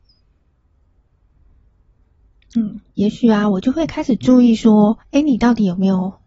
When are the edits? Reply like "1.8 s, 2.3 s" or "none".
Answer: 2.9 s, 5.0 s